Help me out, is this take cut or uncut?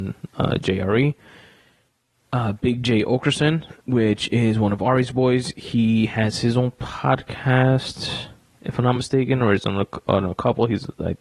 uncut